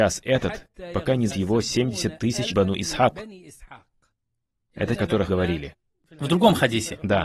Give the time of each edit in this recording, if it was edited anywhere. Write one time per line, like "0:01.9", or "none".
0:01.3
0:02.5
0:04.9
0:05.3